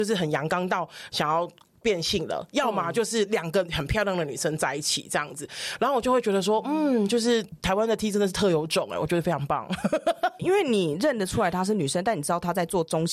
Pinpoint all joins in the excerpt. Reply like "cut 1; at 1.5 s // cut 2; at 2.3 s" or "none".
cut 1; at 10.4 s